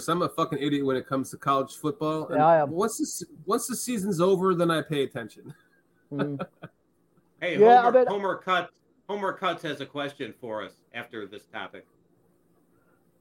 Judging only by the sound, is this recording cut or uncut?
uncut